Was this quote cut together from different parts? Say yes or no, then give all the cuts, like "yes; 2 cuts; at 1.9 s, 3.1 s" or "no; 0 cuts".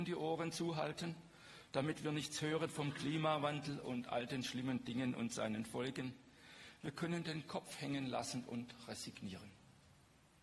no; 0 cuts